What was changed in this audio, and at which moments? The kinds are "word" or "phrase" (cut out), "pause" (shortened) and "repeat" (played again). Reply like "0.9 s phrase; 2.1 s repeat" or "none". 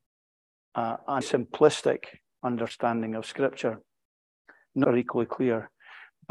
1.2 s word; 4.8 s phrase